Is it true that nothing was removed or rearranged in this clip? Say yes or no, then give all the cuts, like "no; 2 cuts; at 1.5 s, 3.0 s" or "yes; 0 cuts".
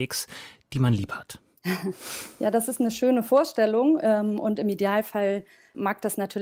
yes; 0 cuts